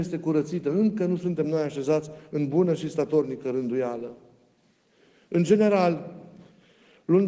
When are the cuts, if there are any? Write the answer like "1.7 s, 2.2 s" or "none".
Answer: none